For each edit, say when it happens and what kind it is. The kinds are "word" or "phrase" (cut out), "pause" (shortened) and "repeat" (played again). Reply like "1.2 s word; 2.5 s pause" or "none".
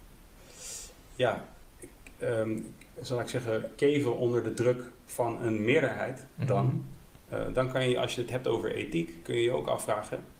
none